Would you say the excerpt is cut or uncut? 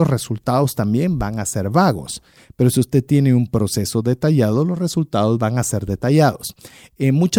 uncut